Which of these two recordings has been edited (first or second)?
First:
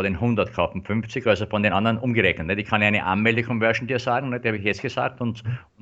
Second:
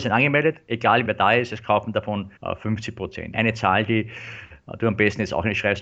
second